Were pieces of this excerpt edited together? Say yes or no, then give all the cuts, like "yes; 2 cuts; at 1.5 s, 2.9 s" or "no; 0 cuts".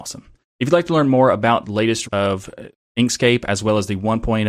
yes; 2 cuts; at 1.6 s, 2.1 s